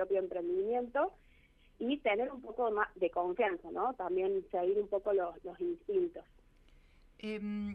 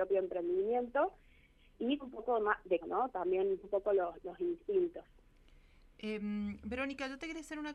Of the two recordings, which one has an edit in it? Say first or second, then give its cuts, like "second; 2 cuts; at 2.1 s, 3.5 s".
second; 3 cuts; at 2.0 s, 2.8 s, 3.6 s